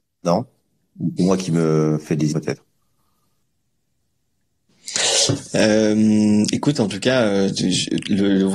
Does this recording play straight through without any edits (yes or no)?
no